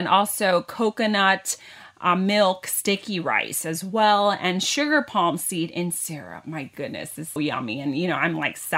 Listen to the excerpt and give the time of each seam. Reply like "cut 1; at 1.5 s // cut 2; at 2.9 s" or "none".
cut 1; at 7.4 s